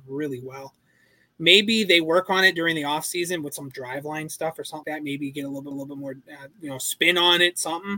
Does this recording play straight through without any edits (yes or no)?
no